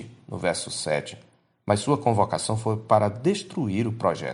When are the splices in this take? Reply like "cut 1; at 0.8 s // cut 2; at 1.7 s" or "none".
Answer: none